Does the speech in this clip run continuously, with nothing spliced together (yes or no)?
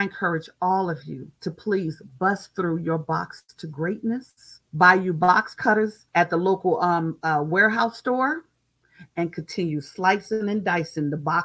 no